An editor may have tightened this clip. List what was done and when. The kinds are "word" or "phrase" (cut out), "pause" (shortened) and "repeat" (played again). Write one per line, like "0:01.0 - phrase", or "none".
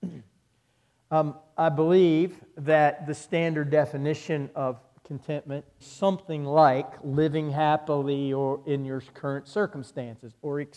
0:05.8 - phrase